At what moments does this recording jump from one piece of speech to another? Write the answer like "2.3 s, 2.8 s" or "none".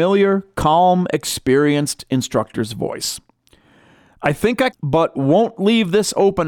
4.7 s